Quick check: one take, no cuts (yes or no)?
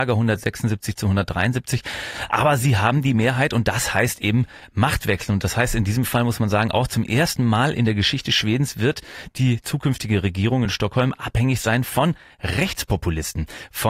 yes